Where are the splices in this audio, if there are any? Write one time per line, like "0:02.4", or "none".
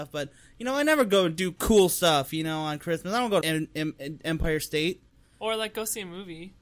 0:03.4